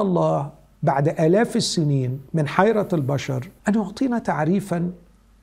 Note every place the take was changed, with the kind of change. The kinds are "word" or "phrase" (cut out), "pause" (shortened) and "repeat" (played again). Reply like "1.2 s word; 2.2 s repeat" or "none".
2.3 s pause; 3.6 s pause